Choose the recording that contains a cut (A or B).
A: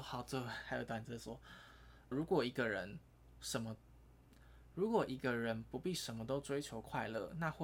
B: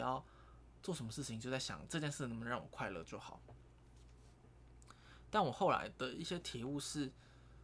A